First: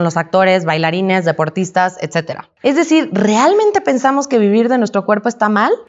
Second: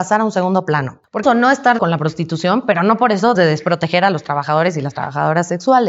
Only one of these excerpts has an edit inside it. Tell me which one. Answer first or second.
second